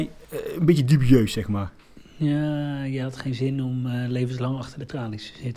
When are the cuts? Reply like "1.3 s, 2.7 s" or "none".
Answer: none